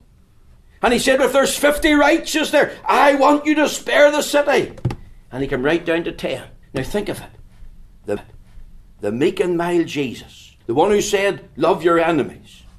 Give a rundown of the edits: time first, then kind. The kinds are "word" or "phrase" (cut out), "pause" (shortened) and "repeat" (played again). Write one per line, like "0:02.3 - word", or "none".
0:01.2 - word
0:06.6 - pause
0:08.2 - repeat
0:10.6 - pause